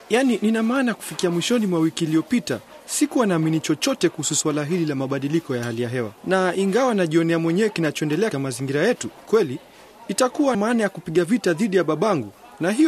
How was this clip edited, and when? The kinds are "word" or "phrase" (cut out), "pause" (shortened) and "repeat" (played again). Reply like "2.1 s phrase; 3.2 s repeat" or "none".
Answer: 6.2 s pause; 8.3 s word; 9.3 s phrase; 10.5 s word